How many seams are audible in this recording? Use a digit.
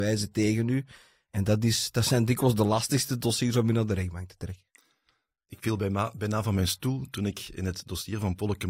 0